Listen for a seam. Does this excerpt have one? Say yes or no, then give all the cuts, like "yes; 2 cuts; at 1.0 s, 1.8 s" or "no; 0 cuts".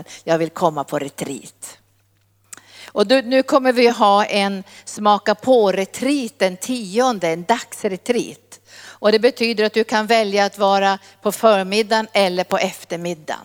no; 0 cuts